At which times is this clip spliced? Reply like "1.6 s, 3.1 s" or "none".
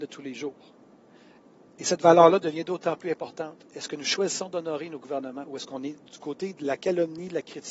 5.5 s, 6.1 s